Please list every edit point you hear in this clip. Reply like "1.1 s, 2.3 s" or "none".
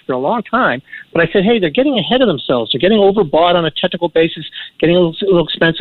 none